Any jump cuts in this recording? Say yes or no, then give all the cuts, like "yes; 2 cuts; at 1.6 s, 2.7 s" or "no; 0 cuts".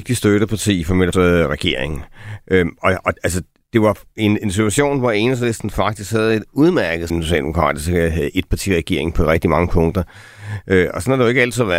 yes; 3 cuts; at 1.1 s, 3.2 s, 7.1 s